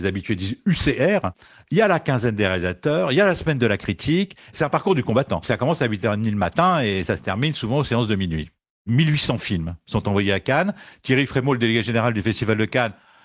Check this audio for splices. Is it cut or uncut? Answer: uncut